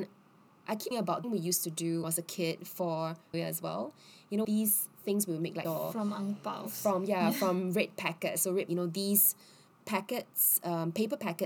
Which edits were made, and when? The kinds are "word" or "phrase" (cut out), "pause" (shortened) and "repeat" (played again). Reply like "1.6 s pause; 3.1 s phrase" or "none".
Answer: 0.9 s word; 1.2 s phrase; 2.0 s phrase; 3.3 s phrase; 4.4 s phrase; 5.6 s word; 8.7 s phrase